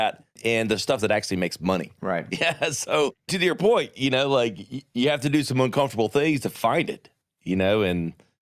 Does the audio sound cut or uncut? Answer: uncut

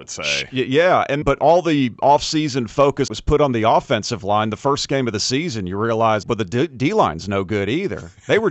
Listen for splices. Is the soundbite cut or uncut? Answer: cut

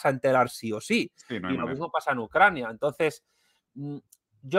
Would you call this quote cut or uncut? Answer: uncut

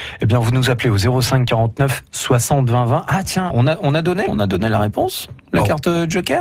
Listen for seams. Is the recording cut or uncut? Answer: cut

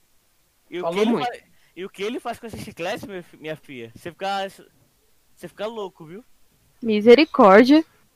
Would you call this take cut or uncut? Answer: uncut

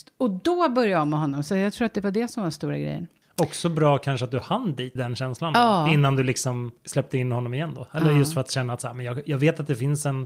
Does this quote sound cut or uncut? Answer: cut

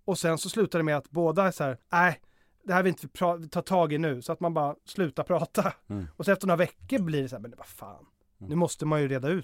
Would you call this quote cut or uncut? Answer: cut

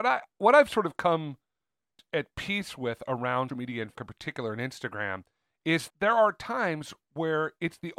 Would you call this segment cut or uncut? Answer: cut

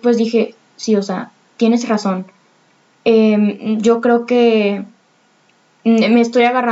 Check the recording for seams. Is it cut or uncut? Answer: uncut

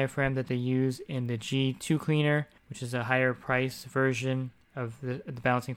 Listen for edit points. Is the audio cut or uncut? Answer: cut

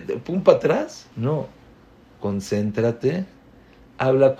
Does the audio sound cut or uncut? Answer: cut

